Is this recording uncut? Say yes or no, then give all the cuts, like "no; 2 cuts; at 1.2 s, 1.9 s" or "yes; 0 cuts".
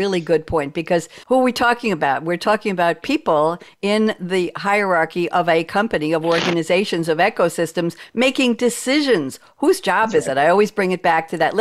no; 1 cut; at 1.2 s